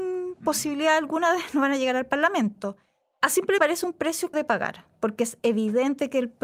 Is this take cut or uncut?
cut